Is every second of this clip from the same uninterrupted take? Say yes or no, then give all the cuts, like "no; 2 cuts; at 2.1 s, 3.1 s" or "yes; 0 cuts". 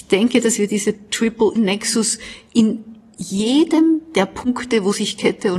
no; 1 cut; at 1.6 s